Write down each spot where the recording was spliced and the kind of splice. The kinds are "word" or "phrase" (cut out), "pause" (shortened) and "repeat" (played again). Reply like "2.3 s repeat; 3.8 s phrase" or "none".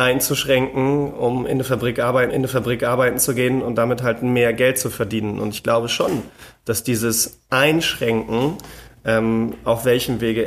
2.3 s repeat